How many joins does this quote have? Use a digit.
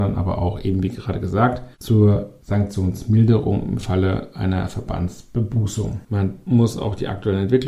2